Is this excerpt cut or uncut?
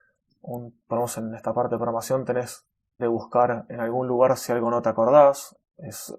cut